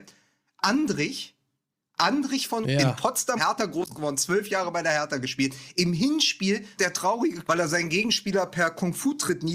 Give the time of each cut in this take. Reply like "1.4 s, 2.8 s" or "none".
2.6 s, 3.4 s, 6.8 s, 7.4 s